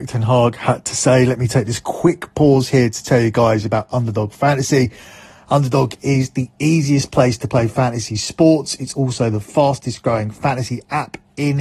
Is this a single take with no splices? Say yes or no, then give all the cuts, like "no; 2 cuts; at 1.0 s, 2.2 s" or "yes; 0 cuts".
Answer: yes; 0 cuts